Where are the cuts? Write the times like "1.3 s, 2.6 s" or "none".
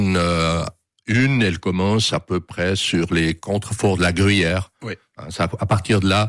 none